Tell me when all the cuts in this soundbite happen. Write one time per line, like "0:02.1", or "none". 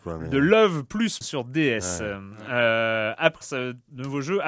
0:01.2
0:03.4

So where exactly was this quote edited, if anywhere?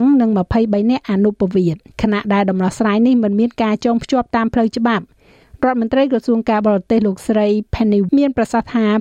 0:01.9
0:08.1

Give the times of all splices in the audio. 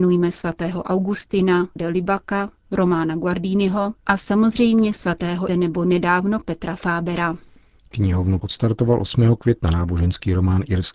0:01.8
0:04.0
0:05.5
0:06.4
0:08.4

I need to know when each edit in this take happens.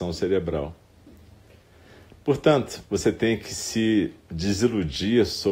0:04.2

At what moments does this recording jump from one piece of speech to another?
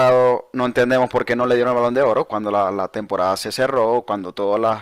none

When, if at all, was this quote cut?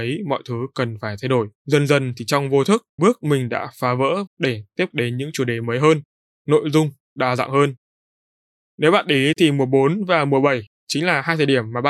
0:01.6
0:03.0
0:04.3
0:04.9

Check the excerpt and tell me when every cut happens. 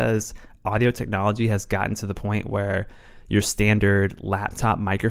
none

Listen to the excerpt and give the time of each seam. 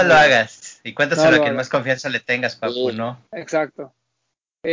0:03.3

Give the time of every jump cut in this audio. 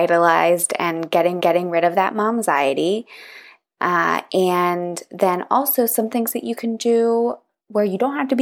0:01.4

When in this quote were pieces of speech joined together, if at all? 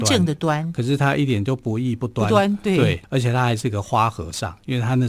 0:03.0

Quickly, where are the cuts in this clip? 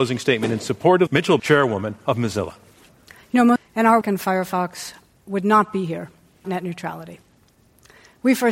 0:01.1
0:01.4
0:03.6
0:04.0
0:06.4

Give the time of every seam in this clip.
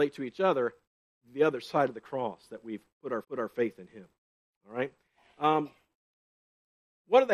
0:03.2

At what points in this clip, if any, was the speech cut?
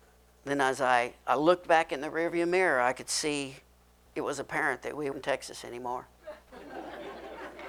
0:04.1
0:05.1

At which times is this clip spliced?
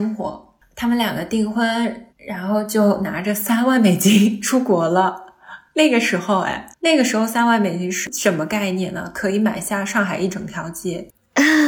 0:02.1
0:06.7

